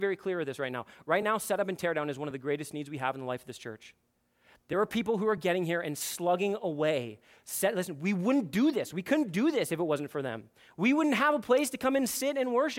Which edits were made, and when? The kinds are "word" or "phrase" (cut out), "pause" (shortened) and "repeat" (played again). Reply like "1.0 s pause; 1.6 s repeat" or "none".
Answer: none